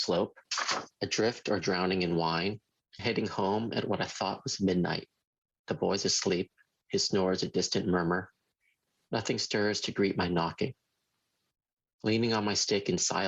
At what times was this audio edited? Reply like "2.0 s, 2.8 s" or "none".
3.0 s